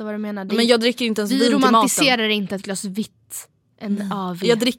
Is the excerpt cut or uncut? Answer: uncut